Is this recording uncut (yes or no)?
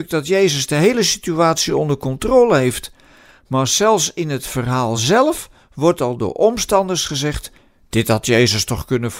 yes